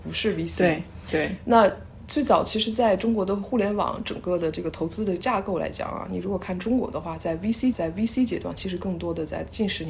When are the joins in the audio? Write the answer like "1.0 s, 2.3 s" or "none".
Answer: 7.7 s